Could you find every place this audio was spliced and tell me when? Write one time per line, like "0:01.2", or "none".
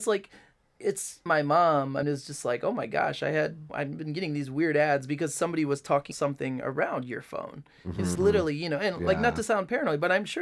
0:01.3
0:02.0
0:03.7
0:06.1
0:08.2